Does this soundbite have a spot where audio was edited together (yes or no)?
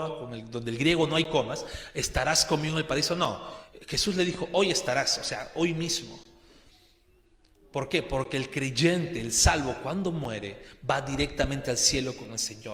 no